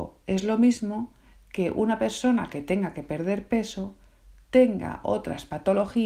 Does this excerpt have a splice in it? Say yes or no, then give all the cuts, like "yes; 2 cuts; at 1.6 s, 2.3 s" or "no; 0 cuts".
no; 0 cuts